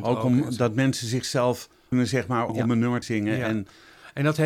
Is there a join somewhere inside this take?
yes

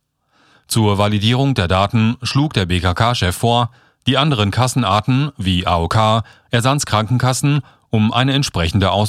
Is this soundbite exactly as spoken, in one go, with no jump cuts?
yes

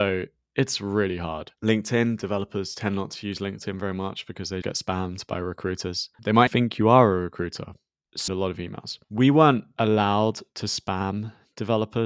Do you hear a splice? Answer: yes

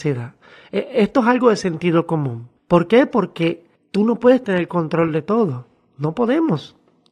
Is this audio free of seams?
no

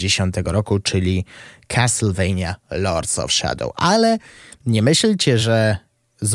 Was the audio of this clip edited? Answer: no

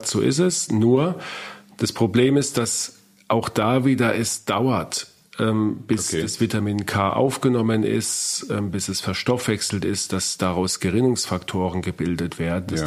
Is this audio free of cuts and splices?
yes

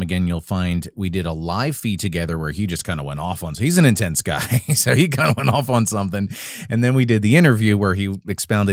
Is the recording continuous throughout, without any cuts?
yes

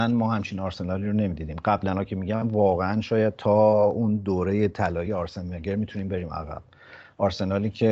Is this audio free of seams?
yes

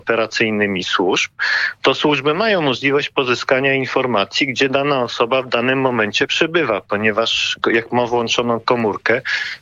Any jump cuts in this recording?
no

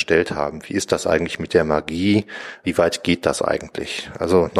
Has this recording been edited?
no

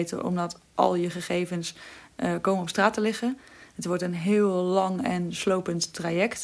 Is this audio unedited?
yes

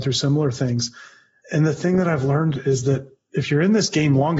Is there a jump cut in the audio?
no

